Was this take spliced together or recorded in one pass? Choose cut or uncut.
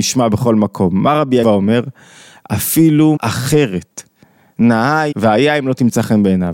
cut